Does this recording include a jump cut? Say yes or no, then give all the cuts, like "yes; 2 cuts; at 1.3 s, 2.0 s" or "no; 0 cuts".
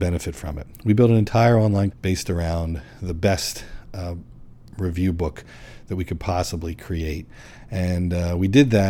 yes; 1 cut; at 1.9 s